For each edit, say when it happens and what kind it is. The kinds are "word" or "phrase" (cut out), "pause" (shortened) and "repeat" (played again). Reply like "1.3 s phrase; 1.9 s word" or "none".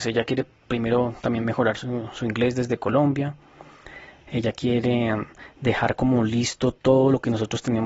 4.2 s pause